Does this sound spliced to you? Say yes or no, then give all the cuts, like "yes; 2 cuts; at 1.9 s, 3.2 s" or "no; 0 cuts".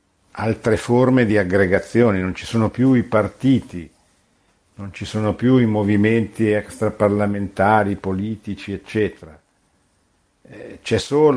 no; 0 cuts